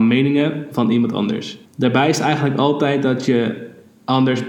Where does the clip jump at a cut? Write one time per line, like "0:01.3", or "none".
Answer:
0:01.7